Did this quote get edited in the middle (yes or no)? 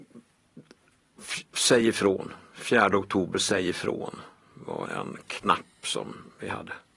yes